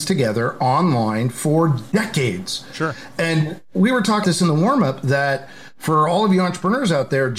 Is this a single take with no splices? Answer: no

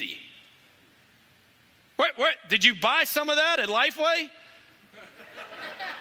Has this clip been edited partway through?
no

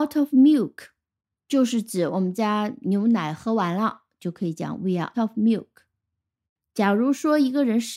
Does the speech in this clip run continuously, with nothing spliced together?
no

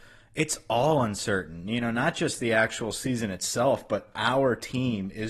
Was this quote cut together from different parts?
no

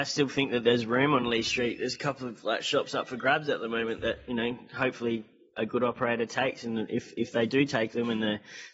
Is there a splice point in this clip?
no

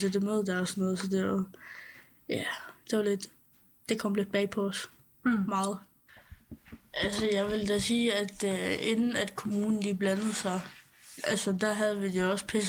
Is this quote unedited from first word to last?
yes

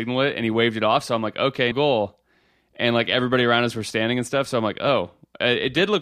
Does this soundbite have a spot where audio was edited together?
yes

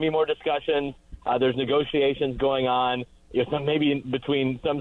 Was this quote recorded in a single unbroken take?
yes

